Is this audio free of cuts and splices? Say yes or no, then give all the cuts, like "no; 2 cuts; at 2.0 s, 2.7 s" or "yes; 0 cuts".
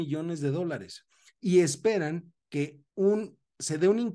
no; 1 cut; at 2.9 s